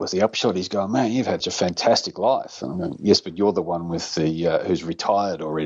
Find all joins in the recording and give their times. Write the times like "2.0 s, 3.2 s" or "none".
1.4 s